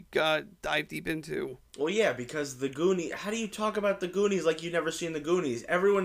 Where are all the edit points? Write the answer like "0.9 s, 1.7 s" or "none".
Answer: none